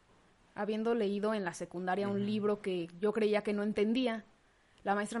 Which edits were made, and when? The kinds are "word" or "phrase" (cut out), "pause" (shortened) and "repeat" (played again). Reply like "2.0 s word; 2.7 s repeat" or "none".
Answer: none